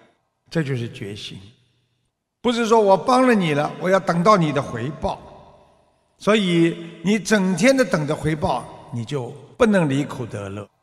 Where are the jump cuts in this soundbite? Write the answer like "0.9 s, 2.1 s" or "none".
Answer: 9.5 s